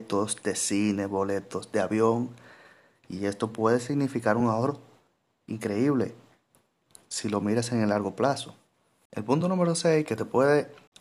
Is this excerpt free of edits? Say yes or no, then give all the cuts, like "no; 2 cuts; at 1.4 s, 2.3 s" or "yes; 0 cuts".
yes; 0 cuts